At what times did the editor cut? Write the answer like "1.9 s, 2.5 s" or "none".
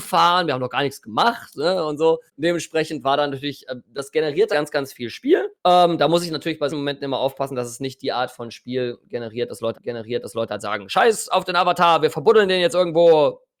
2.3 s, 3.8 s, 4.5 s, 5.5 s, 6.7 s, 9.7 s